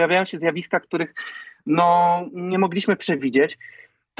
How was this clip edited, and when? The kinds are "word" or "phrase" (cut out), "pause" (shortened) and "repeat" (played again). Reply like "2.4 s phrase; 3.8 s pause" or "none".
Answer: none